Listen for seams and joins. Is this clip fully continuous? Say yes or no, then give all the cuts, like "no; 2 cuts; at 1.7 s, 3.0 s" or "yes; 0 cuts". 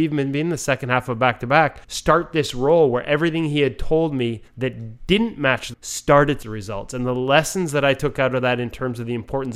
no; 4 cuts; at 1.8 s, 4.5 s, 5.7 s, 6.4 s